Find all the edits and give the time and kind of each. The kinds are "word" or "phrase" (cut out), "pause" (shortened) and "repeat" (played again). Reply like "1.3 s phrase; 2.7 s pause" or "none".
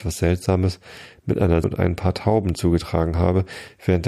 1.6 s word